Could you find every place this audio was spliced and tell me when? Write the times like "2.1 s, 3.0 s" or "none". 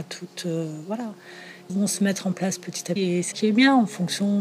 1.7 s, 3.0 s, 3.3 s